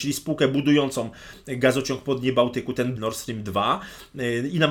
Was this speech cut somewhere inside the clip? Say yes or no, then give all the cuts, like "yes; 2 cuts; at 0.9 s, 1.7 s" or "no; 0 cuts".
yes; 1 cut; at 3.0 s